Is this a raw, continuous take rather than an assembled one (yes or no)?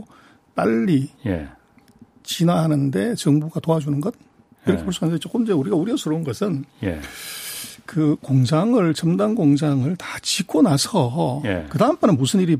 no